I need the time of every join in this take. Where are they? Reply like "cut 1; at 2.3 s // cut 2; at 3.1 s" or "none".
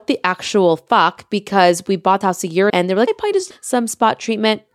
cut 1; at 2.2 s // cut 2; at 2.7 s // cut 3; at 3.1 s // cut 4; at 3.5 s